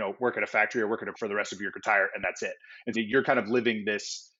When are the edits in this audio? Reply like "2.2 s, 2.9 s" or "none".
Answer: 1.1 s, 1.7 s, 2.9 s